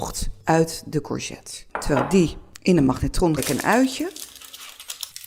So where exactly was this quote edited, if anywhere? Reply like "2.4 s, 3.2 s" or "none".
1.7 s, 3.4 s